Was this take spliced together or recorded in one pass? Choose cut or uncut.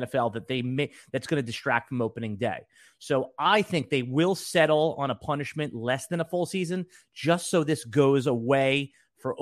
uncut